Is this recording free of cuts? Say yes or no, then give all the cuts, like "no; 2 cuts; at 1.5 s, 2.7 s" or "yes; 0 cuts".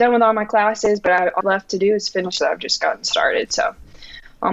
no; 2 cuts; at 1.4 s, 2.4 s